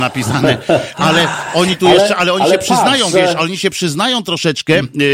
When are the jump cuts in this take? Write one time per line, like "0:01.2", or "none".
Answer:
none